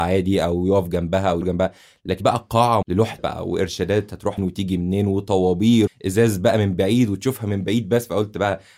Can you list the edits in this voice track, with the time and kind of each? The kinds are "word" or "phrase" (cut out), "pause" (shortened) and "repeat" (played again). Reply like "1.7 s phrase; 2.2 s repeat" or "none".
1.4 s word; 2.2 s word; 2.8 s word; 3.2 s word; 4.4 s word; 5.9 s word